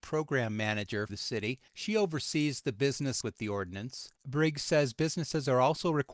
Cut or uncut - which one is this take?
cut